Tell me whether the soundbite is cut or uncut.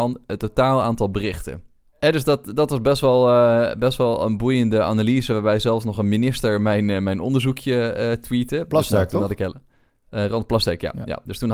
cut